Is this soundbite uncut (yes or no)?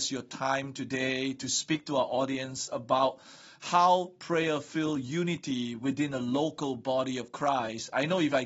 yes